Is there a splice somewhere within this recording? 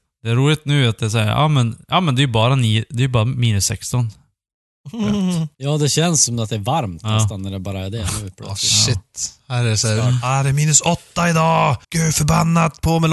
yes; 2 cuts; at 5.5 s, 11.8 s

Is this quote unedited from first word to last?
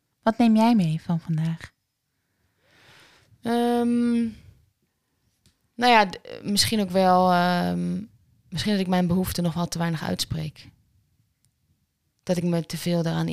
yes; 0 cuts

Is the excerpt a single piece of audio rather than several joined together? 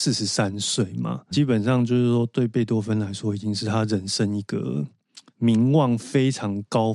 no; 2 cuts; at 1.3 s, 5.3 s

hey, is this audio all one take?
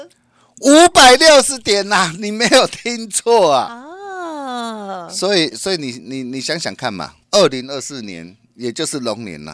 no; 2 cuts; at 5.5 s, 7.2 s

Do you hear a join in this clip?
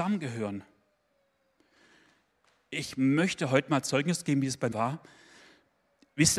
yes; 1 cut; at 4.7 s

